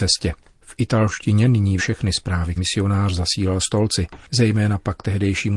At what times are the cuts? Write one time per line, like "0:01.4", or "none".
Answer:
0:01.8
0:02.6
0:03.6